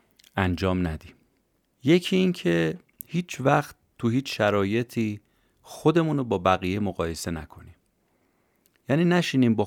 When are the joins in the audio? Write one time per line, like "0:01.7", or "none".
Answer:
none

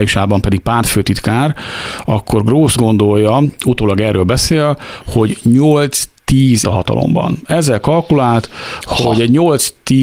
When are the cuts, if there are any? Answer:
0:02.8
0:06.6

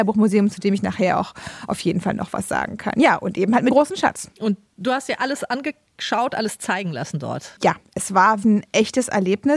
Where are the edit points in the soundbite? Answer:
0:03.7
0:08.4

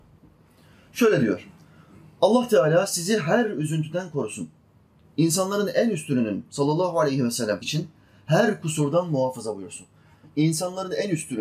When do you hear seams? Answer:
0:07.6

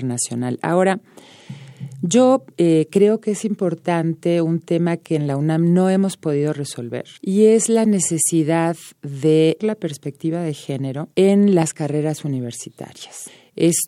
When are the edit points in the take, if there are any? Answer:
0:02.5
0:07.2
0:09.6
0:11.1

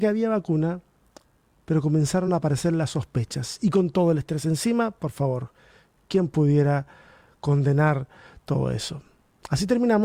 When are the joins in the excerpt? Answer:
none

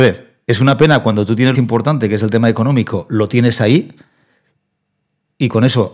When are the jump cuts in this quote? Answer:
0:01.5

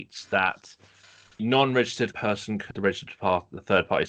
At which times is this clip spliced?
0:01.4
0:02.1
0:02.7

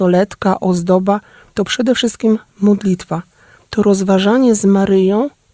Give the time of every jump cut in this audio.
none

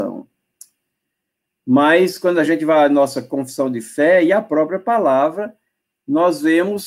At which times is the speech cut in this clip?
none

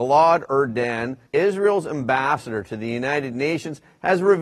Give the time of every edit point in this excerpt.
0:01.3

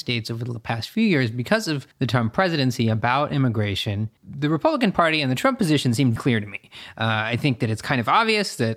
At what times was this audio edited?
0:01.9
0:04.2
0:06.2

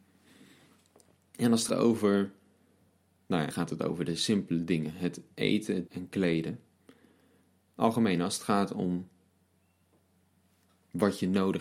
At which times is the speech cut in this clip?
0:01.7
0:03.5
0:05.9

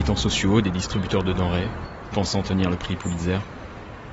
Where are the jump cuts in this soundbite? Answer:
0:02.1

